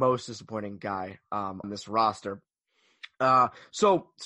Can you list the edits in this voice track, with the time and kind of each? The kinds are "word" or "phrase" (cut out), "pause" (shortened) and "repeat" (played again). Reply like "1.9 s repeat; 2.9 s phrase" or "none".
1.6 s word